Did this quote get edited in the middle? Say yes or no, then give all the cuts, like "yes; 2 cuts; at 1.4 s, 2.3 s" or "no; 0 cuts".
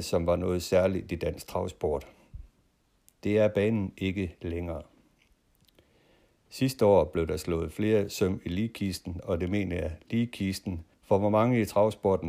yes; 1 cut; at 10.9 s